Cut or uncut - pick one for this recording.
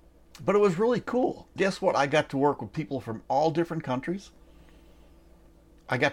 cut